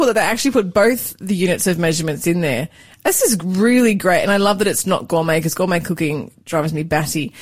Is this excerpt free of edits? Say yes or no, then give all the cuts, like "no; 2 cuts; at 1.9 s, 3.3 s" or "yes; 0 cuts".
yes; 0 cuts